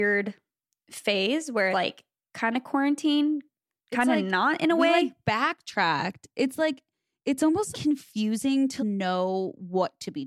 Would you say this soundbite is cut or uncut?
cut